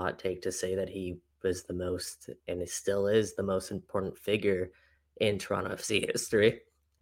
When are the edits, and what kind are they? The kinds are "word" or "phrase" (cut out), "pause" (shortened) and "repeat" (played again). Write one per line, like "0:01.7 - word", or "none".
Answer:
none